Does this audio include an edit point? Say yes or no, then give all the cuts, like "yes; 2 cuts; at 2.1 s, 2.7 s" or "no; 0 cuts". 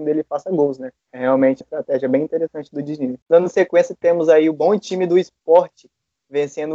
yes; 3 cuts; at 1.0 s, 1.6 s, 3.2 s